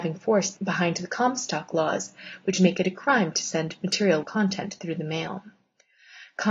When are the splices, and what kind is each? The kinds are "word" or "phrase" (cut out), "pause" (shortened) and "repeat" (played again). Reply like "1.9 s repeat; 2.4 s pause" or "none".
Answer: 4.2 s phrase